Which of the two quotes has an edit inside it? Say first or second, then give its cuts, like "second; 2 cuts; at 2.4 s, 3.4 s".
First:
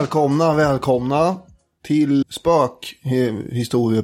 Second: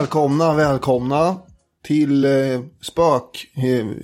first; 1 cut; at 2.2 s